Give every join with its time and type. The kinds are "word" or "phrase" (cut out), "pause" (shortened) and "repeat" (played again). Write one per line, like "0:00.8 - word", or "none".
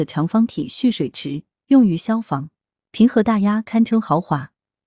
none